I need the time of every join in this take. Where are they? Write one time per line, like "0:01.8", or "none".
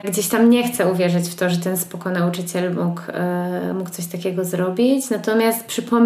none